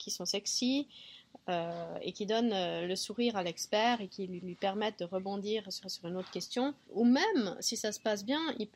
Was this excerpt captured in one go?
no; 3 cuts; at 4.4 s, 5.8 s, 6.9 s

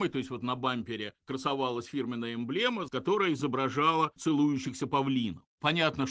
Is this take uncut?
no; 2 cuts; at 2.9 s, 4.2 s

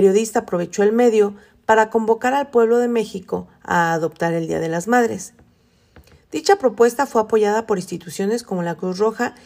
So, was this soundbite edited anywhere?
no; 0 cuts

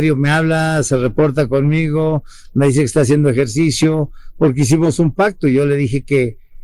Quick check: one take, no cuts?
yes; 0 cuts

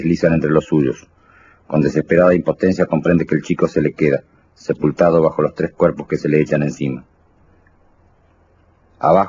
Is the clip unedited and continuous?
yes; 0 cuts

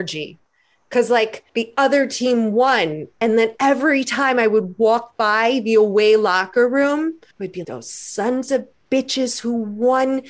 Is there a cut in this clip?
yes; 3 cuts; at 1.5 s, 7.3 s, 7.6 s

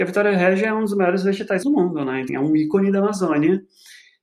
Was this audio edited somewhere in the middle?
yes; 2 cuts; at 1.6 s, 2.3 s

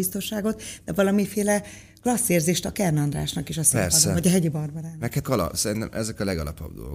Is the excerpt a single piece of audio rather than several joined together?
no; 1 cut; at 5.2 s

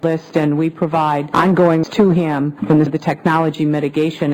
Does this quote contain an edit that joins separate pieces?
yes; 2 cuts; at 1.8 s, 2.9 s

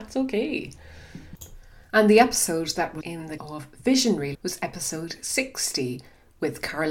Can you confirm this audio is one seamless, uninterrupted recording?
no; 4 cuts; at 1.8 s, 3.0 s, 3.4 s, 4.3 s

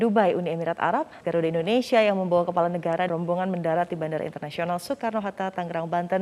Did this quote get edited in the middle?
yes; 2 cuts; at 1.2 s, 3.1 s

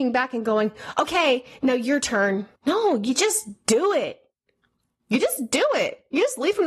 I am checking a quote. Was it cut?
yes; 1 cut; at 2.6 s

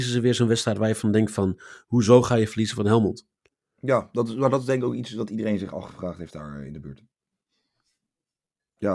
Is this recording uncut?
no; 1 cut; at 3.4 s

